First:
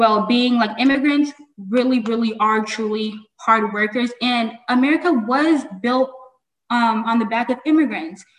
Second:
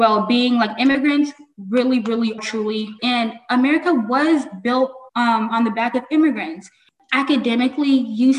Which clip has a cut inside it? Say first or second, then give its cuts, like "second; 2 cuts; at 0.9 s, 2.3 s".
second; 3 cuts; at 2.4 s, 3.0 s, 5.1 s